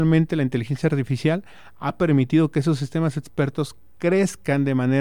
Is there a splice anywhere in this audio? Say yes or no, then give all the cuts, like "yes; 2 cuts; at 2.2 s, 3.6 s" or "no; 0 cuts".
no; 0 cuts